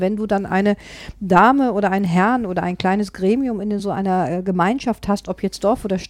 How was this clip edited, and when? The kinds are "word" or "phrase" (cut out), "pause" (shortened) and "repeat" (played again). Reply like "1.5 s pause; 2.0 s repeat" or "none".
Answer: none